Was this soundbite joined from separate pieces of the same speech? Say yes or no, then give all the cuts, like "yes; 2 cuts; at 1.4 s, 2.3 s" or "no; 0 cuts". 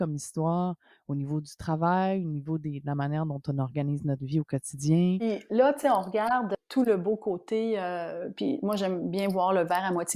no; 0 cuts